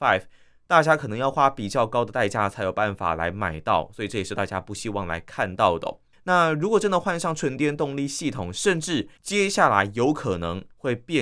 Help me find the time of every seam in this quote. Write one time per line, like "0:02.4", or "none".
0:06.1
0:09.2